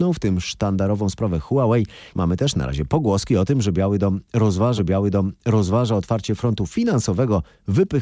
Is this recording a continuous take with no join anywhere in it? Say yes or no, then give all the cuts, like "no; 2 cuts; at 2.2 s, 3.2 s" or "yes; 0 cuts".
no; 1 cut; at 4.8 s